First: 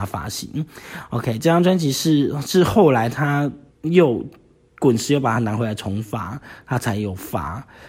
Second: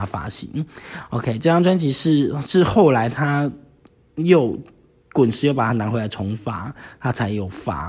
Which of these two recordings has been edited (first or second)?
first